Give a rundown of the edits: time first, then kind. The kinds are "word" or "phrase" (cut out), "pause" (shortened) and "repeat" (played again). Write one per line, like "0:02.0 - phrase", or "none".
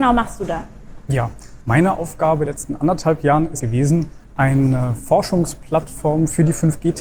0:01.6 - pause
0:02.5 - word
0:03.6 - word
0:04.2 - pause